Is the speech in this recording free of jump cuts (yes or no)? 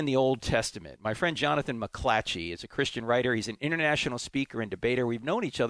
yes